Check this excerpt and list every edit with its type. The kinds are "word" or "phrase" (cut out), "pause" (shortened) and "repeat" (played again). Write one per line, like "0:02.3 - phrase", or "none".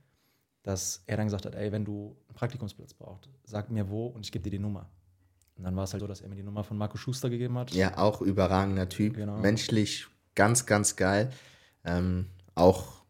0:06.0 - word